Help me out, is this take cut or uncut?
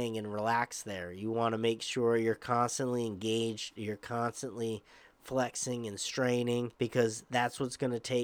cut